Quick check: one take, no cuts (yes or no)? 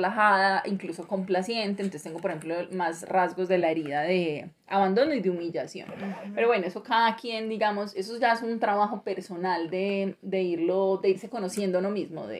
yes